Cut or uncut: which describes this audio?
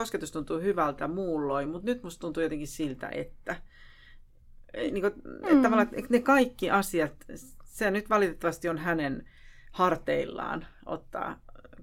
uncut